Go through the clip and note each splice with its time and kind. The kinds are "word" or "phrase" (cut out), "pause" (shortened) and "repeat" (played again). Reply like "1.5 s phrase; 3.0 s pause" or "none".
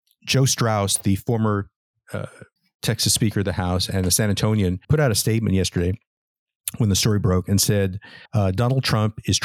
2.6 s pause; 4.8 s pause; 8.3 s pause